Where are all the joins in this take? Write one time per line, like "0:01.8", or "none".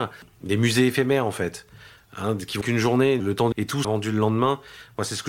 0:02.6
0:03.2
0:03.5
0:03.8